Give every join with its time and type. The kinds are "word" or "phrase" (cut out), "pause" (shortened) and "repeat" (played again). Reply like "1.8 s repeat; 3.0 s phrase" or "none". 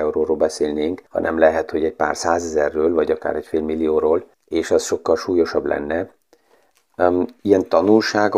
1.1 s pause; 4.3 s pause

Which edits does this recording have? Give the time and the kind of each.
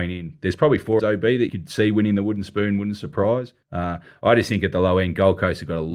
1.0 s phrase; 1.5 s word; 3.6 s pause

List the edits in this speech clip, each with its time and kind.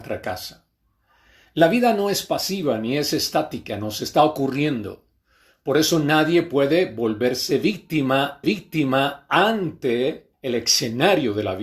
8.4 s repeat

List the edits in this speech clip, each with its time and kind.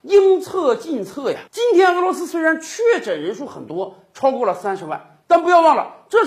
1.5 s pause

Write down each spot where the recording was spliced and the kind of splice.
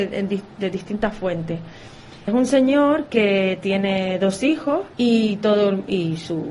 2.3 s word; 4.9 s pause

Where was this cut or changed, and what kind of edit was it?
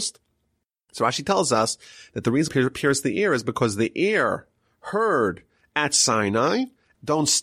2.5 s word

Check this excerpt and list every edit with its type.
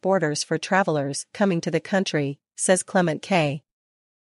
none

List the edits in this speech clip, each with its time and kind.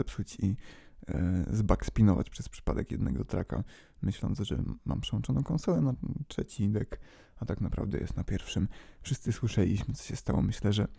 none

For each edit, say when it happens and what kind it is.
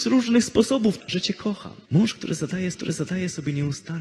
1.0 s word; 1.8 s pause; 2.7 s repeat

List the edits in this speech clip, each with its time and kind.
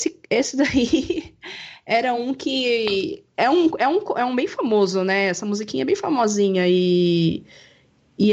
none

